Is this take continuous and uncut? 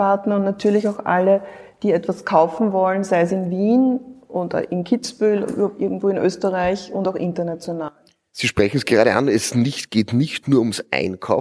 yes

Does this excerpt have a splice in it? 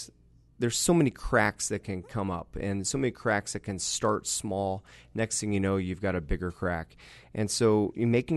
no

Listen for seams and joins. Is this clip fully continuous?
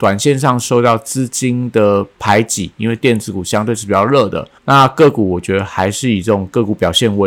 no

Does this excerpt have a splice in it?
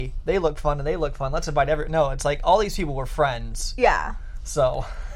no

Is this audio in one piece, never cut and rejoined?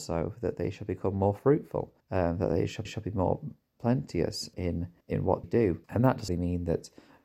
no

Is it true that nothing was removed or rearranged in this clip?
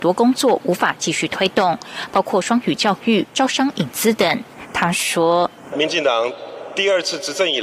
no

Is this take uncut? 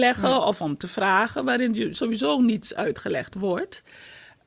yes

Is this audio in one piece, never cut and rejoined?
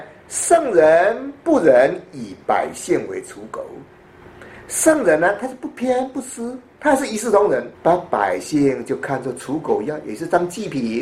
no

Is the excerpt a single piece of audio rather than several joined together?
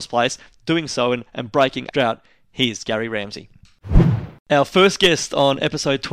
no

